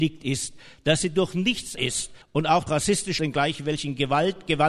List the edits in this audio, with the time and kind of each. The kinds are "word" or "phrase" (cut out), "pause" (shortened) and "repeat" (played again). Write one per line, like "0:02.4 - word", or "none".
0:01.8 - word
0:02.2 - pause
0:02.7 - word
0:03.2 - word